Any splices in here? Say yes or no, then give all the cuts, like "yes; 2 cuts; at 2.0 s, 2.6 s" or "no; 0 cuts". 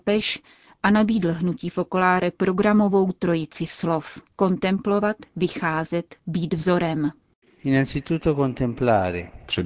yes; 1 cut; at 4.3 s